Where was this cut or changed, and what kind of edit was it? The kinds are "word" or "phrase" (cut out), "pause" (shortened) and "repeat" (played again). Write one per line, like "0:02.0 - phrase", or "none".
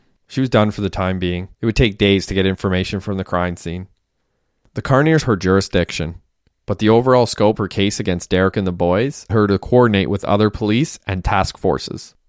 0:01.5 - pause
0:05.2 - phrase
0:07.6 - word
0:09.3 - word